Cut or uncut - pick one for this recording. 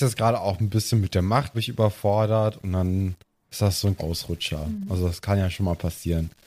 cut